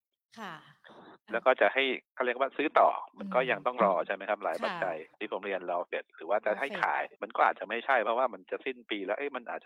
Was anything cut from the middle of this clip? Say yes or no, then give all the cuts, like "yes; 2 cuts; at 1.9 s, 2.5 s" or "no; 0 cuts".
yes; 3 cuts; at 2.1 s, 5.1 s, 7.1 s